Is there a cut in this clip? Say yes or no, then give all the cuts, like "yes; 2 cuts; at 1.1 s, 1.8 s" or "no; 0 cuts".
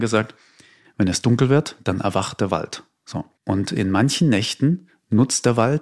yes; 1 cut; at 3.3 s